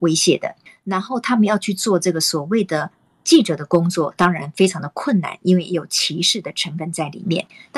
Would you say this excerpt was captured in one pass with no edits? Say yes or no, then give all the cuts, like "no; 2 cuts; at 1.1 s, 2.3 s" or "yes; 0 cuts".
yes; 0 cuts